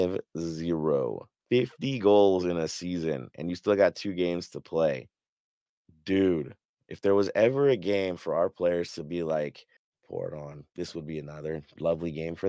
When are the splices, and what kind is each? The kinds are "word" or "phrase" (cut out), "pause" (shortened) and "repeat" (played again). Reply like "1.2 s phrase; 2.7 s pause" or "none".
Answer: 1.3 s pause; 5.3 s pause; 9.8 s pause; 10.7 s pause